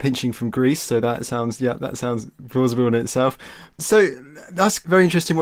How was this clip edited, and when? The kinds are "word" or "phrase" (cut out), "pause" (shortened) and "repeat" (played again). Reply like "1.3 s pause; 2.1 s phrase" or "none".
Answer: none